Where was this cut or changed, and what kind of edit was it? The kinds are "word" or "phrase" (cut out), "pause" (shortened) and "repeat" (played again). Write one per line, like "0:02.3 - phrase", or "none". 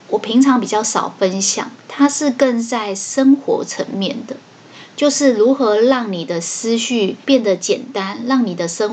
0:01.8 - pause
0:07.2 - pause